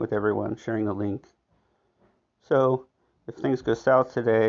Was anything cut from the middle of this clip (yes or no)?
no